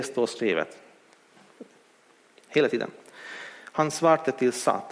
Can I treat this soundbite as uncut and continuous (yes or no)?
yes